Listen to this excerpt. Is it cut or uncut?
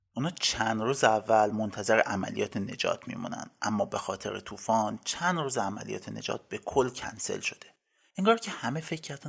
uncut